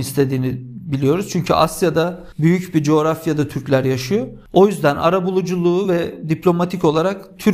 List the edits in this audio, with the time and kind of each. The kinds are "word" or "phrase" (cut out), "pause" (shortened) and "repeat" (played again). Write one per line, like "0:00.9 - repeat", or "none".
none

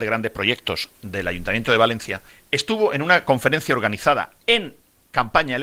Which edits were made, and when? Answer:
0:02.3 - pause

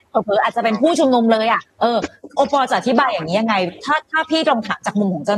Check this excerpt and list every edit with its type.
0:01.7 - pause

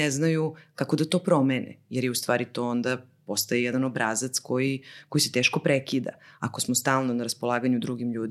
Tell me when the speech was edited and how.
none

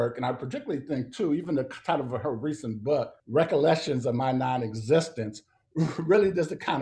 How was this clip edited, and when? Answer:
0:03.2 - pause

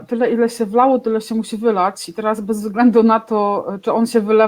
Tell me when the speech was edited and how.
none

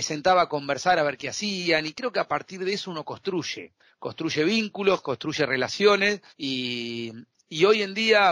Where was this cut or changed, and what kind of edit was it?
0:06.3 - pause

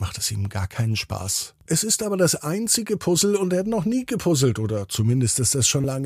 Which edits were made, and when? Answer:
0:01.6 - pause

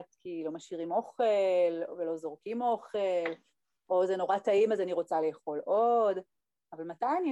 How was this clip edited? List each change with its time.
none

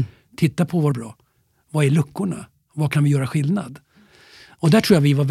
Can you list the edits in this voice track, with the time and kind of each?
0:00.9 - phrase

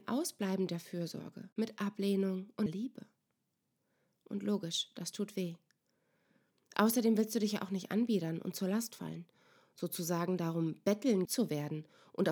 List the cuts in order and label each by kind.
0:01.5 - pause
0:02.7 - word
0:11.2 - word

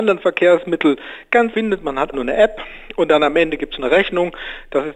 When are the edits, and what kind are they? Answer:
0:01.5 - word
0:02.1 - word

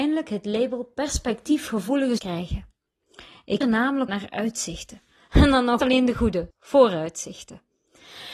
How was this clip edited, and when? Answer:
0:02.2 - word
0:03.6 - word
0:04.1 - word
0:05.8 - word
0:06.5 - word

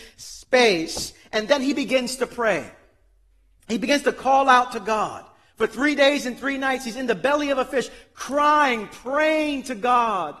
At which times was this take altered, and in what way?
none

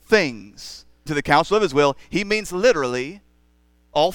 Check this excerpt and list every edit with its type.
0:01.1 - word

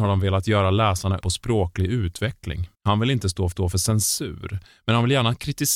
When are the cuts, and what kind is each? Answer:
0:01.2 - word
0:02.7 - pause
0:03.5 - repeat

